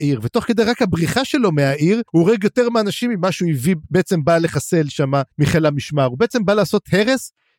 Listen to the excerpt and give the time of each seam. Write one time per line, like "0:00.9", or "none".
0:02.1
0:05.3